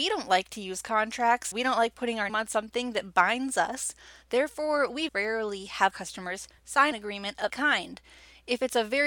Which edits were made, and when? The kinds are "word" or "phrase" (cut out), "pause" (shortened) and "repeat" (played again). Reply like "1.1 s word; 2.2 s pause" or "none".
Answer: 1.5 s word; 2.3 s word; 5.1 s word; 5.9 s word; 6.9 s word; 7.5 s word